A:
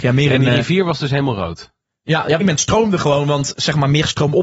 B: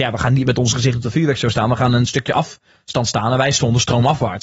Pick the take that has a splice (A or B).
A